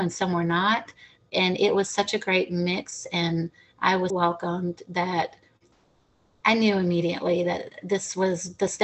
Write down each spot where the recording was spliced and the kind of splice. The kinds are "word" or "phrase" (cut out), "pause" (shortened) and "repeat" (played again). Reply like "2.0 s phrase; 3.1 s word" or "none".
4.1 s word